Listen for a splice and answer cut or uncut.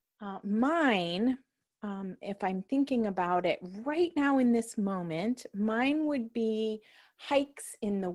uncut